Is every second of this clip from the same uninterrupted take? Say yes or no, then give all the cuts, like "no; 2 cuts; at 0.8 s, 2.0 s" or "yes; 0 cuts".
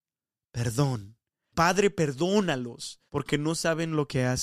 no; 2 cuts; at 1.5 s, 3.1 s